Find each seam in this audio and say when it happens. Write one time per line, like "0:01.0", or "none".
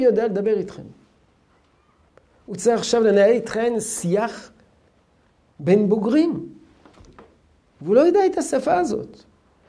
none